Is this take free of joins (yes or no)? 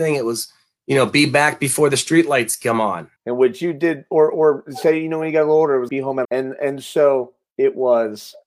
no